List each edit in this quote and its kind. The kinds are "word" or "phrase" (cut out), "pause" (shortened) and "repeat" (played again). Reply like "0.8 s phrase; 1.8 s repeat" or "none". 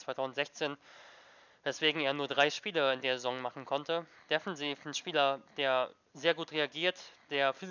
none